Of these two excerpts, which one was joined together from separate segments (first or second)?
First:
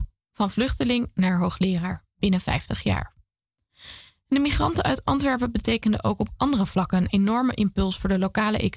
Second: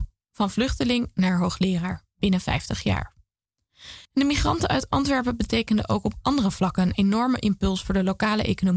second